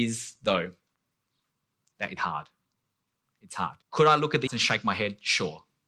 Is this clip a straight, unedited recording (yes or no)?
no